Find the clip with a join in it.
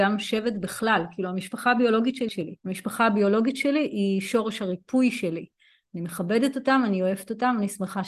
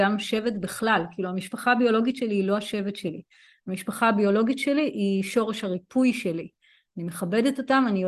first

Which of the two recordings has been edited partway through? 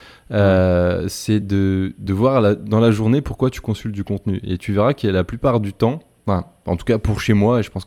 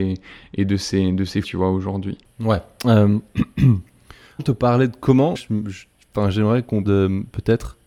second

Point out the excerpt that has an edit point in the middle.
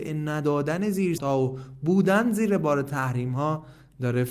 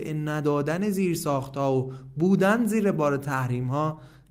first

